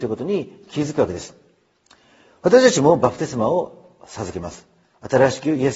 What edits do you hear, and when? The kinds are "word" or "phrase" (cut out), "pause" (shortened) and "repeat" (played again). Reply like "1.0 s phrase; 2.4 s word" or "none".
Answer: none